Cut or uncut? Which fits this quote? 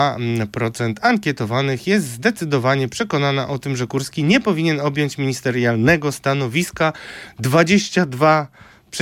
uncut